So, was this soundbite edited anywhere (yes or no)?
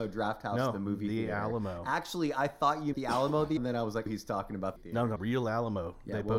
yes